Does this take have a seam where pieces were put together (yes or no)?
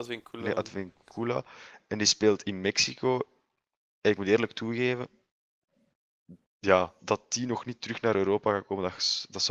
yes